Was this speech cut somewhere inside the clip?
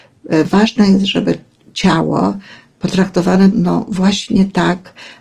yes; 1 cut; at 3.5 s

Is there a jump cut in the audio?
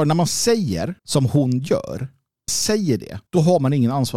yes; 3 cuts; at 1.0 s, 2.5 s, 3.3 s

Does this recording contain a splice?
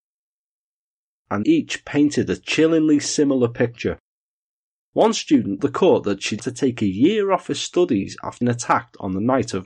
yes; 4 cuts; at 1.4 s, 5.6 s, 6.4 s, 8.4 s

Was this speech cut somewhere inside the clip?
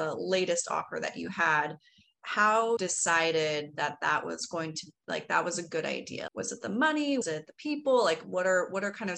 yes; 3 cuts; at 2.8 s, 6.3 s, 7.2 s

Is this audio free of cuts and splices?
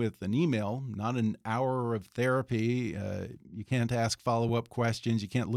yes; 0 cuts

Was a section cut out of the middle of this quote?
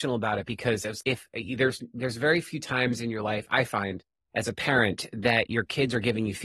yes; 1 cut; at 1.0 s

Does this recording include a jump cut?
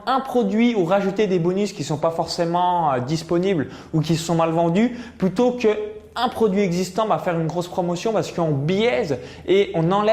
no; 0 cuts

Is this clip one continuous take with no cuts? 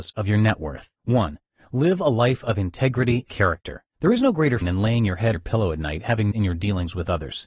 no; 6 cuts; at 1.0 s, 3.3 s, 3.9 s, 4.6 s, 5.3 s, 6.3 s

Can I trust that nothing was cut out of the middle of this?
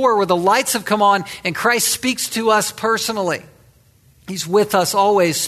yes; 0 cuts

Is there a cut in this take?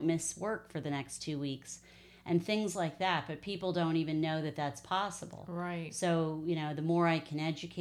no; 0 cuts

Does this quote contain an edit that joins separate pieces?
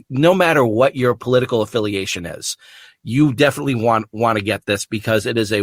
no; 0 cuts

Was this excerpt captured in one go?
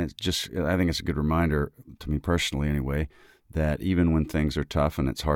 yes; 0 cuts

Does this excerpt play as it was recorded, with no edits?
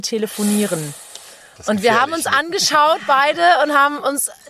yes; 0 cuts

